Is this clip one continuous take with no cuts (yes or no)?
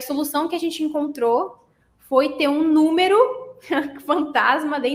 yes